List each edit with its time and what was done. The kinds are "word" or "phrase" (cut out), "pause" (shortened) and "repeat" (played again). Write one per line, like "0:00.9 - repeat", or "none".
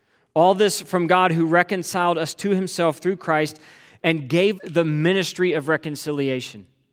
0:04.6 - word